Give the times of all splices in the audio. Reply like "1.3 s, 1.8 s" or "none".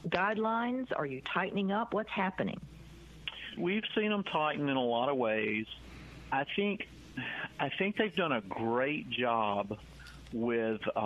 3.6 s